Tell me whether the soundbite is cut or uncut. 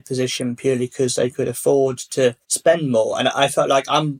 cut